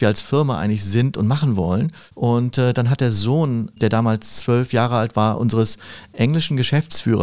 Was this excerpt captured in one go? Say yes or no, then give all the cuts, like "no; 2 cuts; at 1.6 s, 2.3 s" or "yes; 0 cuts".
yes; 0 cuts